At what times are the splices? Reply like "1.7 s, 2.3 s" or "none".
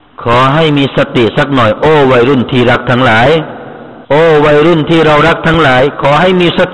4.0 s

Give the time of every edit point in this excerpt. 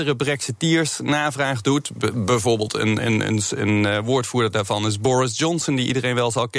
none

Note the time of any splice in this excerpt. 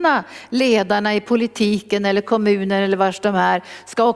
none

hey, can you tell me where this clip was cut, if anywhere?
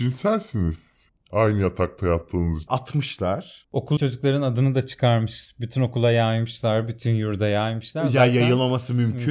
2.7 s, 4.0 s

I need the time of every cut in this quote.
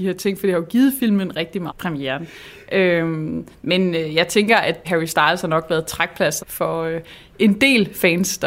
1.7 s, 4.8 s, 6.4 s

